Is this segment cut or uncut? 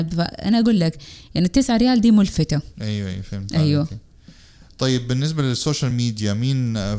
uncut